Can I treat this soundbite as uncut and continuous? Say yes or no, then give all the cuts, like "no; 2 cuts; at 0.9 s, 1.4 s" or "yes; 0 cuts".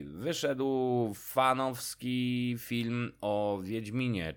yes; 0 cuts